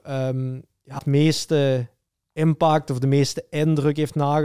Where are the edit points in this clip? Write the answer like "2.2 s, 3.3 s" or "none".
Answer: 1.0 s